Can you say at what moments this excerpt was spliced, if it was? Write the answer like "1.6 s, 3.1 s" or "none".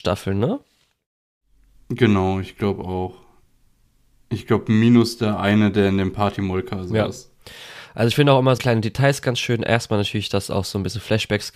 8.6 s